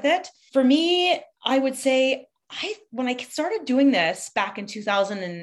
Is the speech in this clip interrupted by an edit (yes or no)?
yes